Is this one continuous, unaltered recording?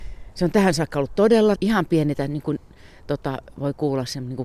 no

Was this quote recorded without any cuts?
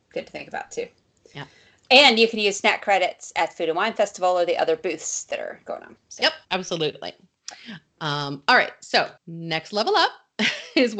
no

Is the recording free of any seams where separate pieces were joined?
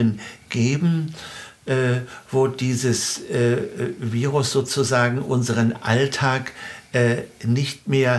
yes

